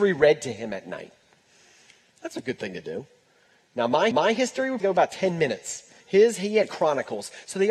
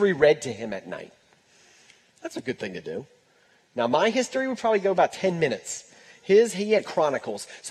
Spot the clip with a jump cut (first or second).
first